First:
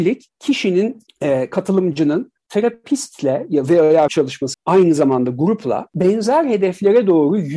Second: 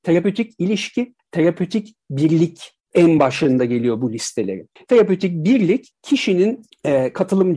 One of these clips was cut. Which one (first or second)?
first